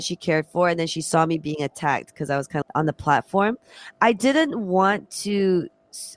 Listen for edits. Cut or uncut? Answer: cut